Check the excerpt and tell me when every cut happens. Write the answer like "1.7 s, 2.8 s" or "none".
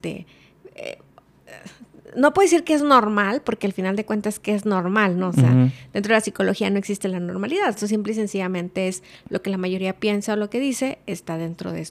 none